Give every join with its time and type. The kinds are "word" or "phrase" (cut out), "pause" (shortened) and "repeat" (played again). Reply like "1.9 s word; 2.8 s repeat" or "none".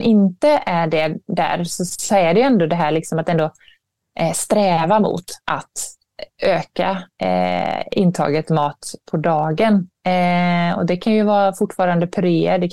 5.4 s pause; 7.1 s pause